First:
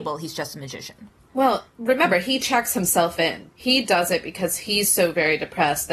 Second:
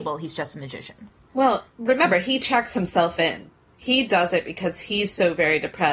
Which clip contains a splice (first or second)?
first